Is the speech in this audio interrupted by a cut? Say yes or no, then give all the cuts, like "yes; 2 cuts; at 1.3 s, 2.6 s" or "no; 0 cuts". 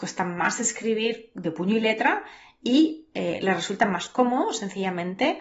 no; 0 cuts